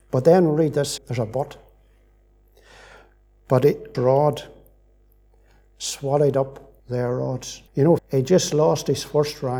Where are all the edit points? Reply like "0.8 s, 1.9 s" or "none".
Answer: 1.0 s, 3.9 s, 6.8 s, 7.7 s, 8.0 s